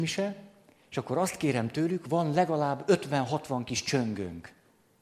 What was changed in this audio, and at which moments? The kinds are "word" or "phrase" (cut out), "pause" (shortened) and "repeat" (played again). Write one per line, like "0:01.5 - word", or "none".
none